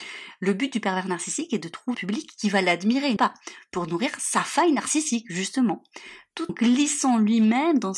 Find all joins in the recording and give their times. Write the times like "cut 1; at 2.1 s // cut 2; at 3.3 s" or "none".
cut 1; at 1.9 s // cut 2; at 3.2 s // cut 3; at 6.5 s